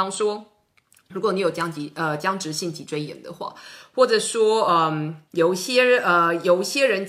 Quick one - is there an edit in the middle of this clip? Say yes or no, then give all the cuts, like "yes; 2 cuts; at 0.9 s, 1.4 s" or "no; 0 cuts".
yes; 1 cut; at 5.3 s